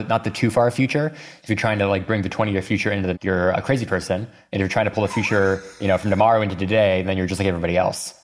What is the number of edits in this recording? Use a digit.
2